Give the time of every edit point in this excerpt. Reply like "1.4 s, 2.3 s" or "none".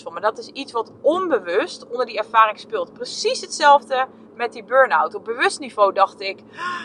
none